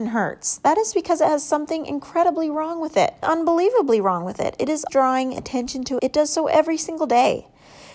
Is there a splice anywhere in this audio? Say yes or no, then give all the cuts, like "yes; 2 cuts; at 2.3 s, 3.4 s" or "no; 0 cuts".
yes; 3 cuts; at 3.2 s, 4.9 s, 6.0 s